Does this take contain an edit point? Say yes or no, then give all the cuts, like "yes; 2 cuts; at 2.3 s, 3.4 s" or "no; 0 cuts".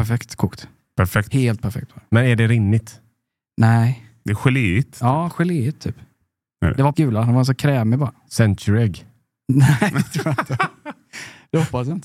yes; 1 cut; at 6.9 s